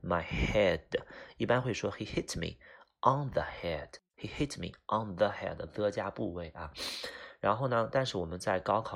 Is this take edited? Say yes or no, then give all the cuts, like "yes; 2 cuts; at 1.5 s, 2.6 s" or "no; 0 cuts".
no; 0 cuts